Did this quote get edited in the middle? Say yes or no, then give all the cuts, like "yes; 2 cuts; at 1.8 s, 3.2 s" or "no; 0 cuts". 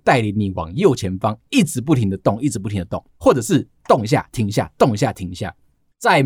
yes; 1 cut; at 3.1 s